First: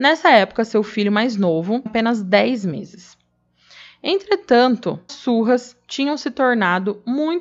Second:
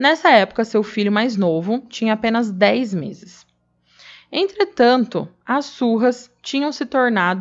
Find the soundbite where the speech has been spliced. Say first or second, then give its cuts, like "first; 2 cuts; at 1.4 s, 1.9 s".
first; 2 cuts; at 1.9 s, 5.1 s